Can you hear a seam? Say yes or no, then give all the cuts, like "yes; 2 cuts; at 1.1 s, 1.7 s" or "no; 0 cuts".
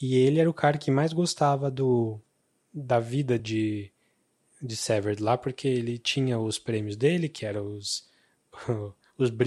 no; 0 cuts